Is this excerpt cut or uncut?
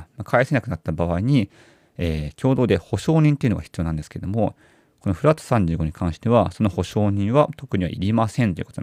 uncut